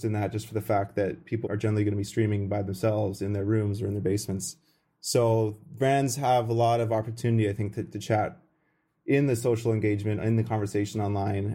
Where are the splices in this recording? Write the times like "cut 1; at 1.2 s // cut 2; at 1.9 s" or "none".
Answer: cut 1; at 1.4 s